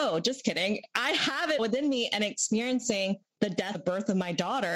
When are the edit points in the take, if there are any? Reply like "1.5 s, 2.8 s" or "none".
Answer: 1.6 s, 3.7 s